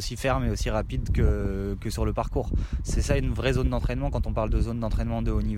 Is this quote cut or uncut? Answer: uncut